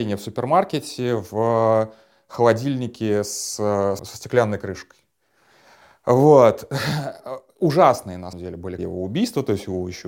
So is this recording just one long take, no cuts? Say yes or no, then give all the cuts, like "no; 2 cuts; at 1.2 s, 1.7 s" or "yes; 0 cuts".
no; 3 cuts; at 4.0 s, 8.3 s, 8.8 s